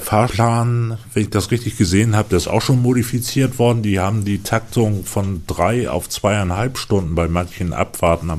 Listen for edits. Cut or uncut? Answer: uncut